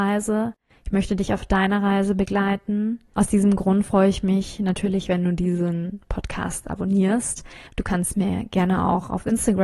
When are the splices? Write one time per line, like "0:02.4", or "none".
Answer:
0:07.7